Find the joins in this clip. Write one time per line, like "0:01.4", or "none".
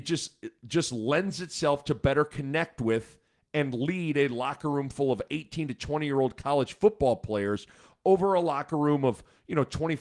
none